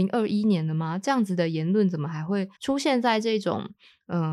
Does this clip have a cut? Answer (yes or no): yes